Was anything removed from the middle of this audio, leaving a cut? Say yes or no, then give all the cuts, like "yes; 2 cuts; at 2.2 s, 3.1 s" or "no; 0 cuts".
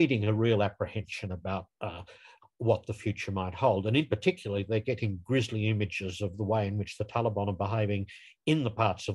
no; 0 cuts